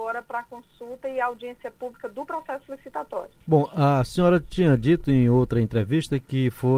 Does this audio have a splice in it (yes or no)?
yes